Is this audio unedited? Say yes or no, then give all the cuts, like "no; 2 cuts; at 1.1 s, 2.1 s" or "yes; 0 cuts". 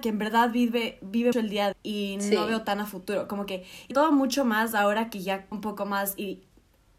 no; 4 cuts; at 1.3 s, 1.7 s, 3.9 s, 5.5 s